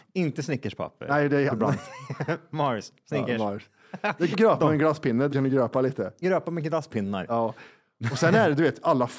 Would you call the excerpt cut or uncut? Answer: cut